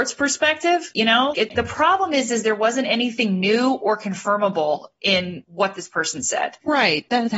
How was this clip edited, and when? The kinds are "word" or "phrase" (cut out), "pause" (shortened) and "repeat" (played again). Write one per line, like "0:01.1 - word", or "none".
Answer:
0:01.3 - word